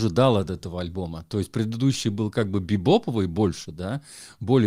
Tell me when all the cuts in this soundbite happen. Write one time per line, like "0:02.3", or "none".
none